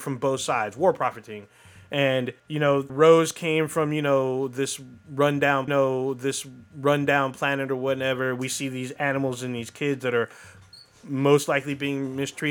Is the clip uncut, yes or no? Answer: no